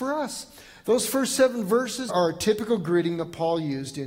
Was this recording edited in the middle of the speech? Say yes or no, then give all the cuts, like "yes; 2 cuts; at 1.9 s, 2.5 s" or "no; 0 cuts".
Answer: yes; 1 cut; at 2.1 s